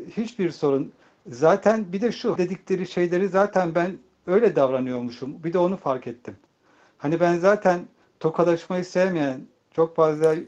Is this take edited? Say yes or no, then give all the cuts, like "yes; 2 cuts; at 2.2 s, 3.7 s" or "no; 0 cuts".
yes; 1 cut; at 2.4 s